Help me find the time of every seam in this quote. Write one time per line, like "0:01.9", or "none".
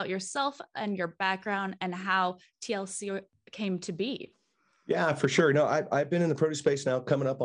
none